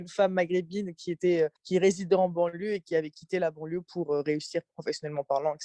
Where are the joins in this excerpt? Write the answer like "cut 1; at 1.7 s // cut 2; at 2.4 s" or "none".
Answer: cut 1; at 1.6 s